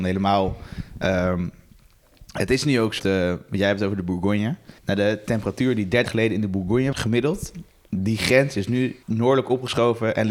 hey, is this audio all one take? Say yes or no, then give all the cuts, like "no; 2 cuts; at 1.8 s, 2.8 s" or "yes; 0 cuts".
no; 5 cuts; at 3.0 s, 4.8 s, 6.1 s, 6.9 s, 9.0 s